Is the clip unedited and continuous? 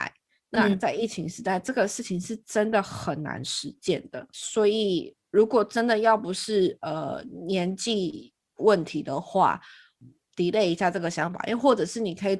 yes; 0 cuts

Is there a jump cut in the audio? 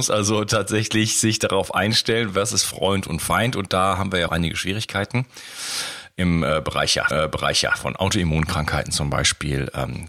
yes; 2 cuts; at 4.3 s, 7.1 s

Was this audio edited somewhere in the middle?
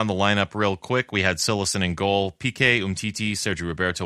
no; 0 cuts

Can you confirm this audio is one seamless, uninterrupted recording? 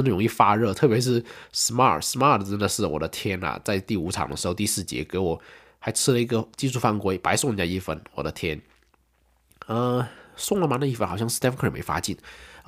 yes; 0 cuts

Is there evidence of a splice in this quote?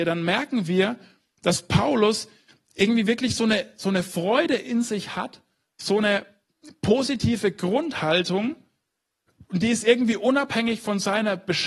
no; 0 cuts

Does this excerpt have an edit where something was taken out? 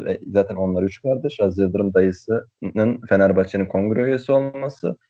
no; 0 cuts

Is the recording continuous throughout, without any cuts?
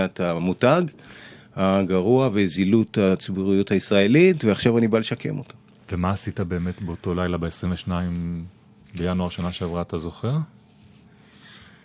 yes; 0 cuts

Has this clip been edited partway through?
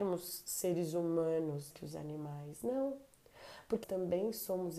yes; 2 cuts; at 1.7 s, 3.8 s

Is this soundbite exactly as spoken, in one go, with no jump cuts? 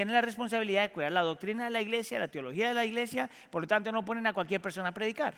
yes; 0 cuts

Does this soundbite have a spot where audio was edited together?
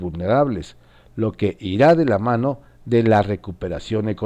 no; 0 cuts

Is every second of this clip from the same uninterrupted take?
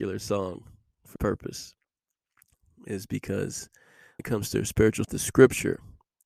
no; 3 cuts; at 1.2 s, 4.2 s, 5.0 s

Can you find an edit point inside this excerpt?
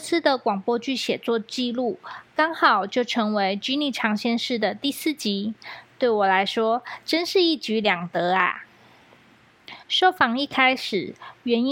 yes; 1 cut; at 9.8 s

